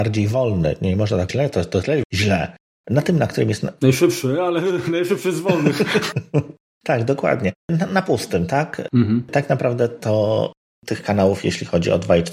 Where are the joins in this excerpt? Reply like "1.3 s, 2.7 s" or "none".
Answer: 1.3 s, 2.0 s, 7.6 s